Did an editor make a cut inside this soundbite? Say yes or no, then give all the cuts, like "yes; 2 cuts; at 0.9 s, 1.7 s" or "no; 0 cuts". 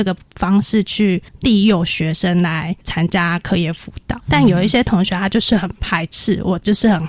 yes; 3 cuts; at 1.3 s, 2.8 s, 4.2 s